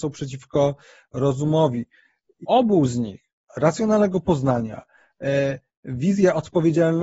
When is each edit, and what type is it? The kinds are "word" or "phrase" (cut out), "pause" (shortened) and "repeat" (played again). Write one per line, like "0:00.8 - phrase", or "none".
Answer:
0:02.4 - word
0:03.5 - word